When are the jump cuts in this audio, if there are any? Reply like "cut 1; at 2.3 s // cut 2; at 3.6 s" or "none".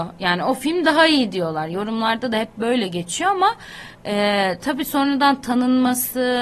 none